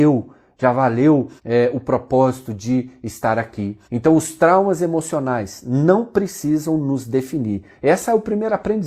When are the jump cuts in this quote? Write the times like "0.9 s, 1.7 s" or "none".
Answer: 1.4 s, 3.8 s